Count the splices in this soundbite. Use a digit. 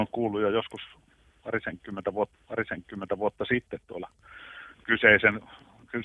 2